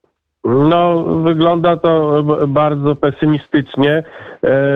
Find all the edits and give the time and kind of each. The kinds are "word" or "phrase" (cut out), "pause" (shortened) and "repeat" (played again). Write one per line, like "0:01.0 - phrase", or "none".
none